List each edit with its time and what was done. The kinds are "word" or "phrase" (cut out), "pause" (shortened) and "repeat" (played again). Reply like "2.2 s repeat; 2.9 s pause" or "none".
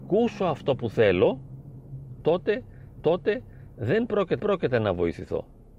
3.0 s repeat; 4.4 s repeat